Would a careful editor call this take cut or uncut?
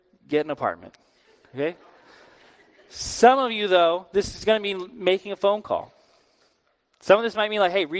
uncut